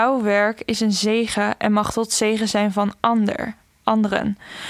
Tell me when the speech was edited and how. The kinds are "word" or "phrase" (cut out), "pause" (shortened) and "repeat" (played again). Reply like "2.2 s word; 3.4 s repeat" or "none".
none